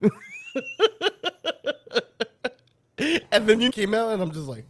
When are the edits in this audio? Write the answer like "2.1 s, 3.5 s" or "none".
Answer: 3.7 s